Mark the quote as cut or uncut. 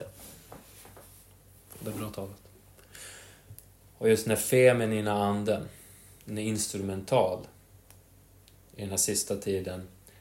uncut